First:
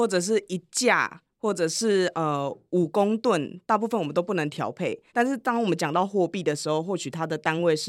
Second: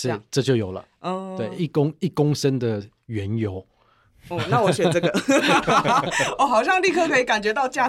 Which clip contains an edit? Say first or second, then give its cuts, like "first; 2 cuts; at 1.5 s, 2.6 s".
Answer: first; 1 cut; at 5.1 s